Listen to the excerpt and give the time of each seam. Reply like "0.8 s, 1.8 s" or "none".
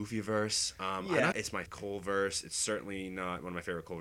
1.3 s, 1.7 s